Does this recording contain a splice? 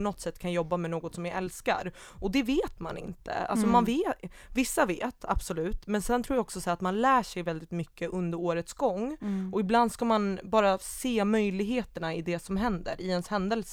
no; 0 cuts

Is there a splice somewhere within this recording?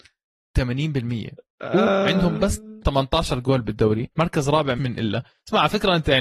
yes; 3 cuts; at 2.8 s, 4.1 s, 4.8 s

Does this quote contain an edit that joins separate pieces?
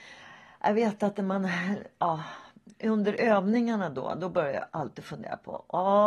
no; 0 cuts

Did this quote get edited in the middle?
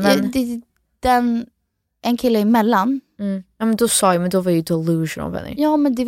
no; 0 cuts

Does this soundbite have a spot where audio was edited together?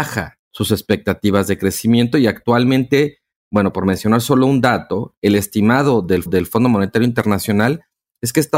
yes; 1 cut; at 6.3 s

